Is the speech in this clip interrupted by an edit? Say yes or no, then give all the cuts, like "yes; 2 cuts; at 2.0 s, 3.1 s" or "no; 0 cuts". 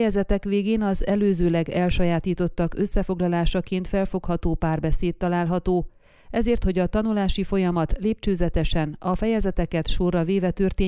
yes; 1 cut; at 6.6 s